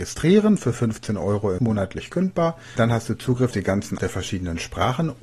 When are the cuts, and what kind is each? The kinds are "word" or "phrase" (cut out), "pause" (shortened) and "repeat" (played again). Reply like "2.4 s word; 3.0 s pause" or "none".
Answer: 1.6 s word; 2.8 s word; 3.5 s word; 4.0 s word